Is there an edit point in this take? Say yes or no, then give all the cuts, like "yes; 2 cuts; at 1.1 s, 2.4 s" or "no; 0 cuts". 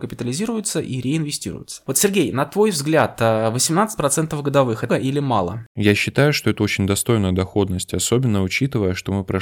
yes; 1 cut; at 4.9 s